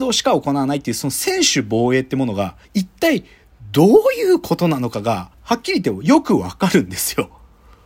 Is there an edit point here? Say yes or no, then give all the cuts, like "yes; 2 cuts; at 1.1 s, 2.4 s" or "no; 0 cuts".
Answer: yes; 2 cuts; at 2.6 s, 5.3 s